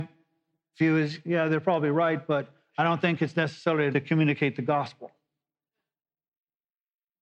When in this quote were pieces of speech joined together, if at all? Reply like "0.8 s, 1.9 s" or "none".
3.9 s